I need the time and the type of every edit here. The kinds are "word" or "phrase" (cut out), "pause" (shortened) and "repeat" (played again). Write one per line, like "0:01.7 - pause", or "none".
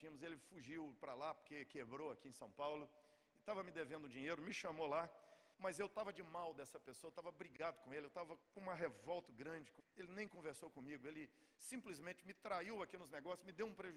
0:05.5 - pause
0:08.4 - pause
0:09.3 - word
0:09.8 - phrase